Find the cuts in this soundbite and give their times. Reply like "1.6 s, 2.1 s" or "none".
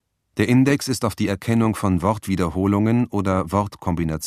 none